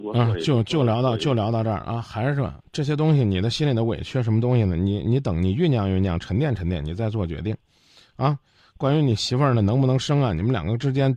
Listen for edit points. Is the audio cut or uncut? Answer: uncut